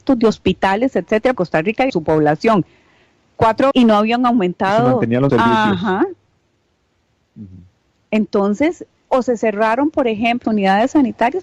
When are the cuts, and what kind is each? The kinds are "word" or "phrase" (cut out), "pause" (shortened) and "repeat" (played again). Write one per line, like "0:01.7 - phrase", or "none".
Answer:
0:01.3 - word
0:01.9 - word
0:03.7 - word
0:05.3 - word
0:09.1 - word
0:10.4 - word

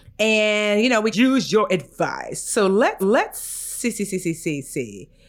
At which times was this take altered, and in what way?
0:01.1 - word
0:03.0 - repeat

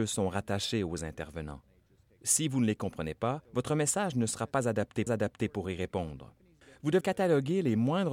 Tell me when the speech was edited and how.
0:03.4 - pause
0:05.1 - repeat
0:07.0 - word

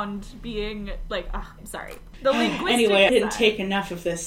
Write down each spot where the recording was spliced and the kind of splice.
0:01.6 - word
0:03.1 - phrase

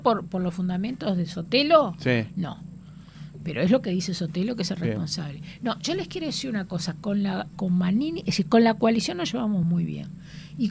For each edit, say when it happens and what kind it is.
none

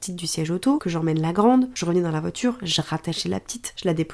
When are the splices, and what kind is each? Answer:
none

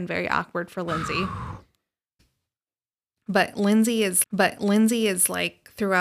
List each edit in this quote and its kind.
0:04.2 - repeat

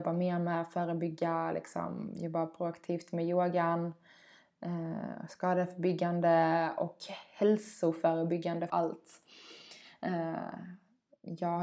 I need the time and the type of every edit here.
0:08.7 - word

